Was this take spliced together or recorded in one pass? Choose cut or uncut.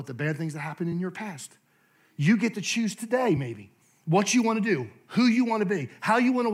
uncut